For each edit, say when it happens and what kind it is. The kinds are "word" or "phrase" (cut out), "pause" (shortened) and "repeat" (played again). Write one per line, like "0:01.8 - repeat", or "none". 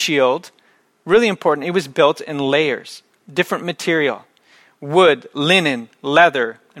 none